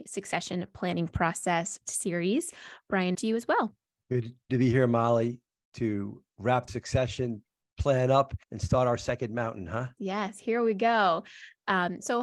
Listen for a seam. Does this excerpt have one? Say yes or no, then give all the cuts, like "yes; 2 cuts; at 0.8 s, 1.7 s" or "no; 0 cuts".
yes; 6 cuts; at 1.9 s, 3.1 s, 4.5 s, 6.7 s, 8.4 s, 10.0 s